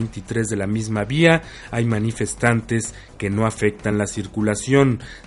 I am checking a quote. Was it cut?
no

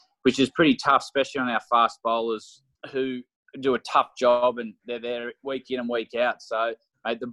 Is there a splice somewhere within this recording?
yes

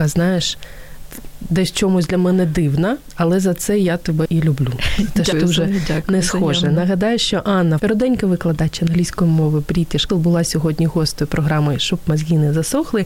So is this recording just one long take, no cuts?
no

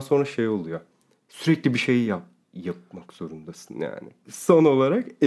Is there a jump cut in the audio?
no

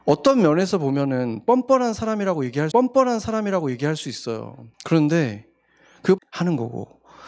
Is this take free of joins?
no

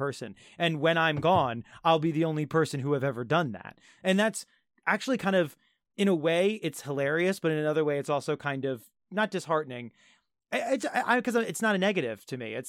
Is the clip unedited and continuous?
yes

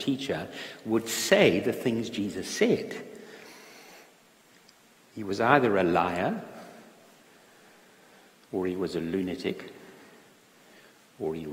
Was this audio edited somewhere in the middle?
no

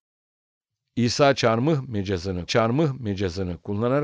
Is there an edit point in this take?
yes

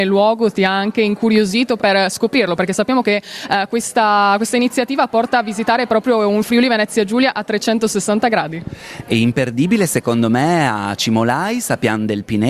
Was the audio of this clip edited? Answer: yes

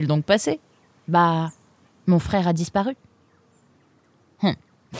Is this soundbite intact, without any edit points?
yes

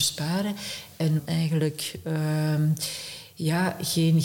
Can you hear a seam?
yes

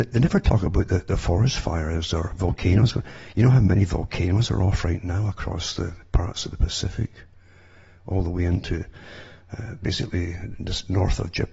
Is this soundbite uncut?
yes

